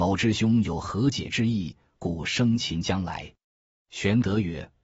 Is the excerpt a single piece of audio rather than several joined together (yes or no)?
yes